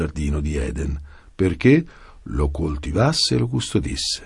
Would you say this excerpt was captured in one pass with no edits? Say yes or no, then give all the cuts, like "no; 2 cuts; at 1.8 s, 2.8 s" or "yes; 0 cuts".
yes; 0 cuts